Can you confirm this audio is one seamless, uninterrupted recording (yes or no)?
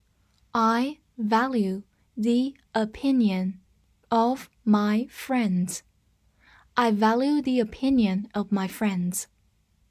yes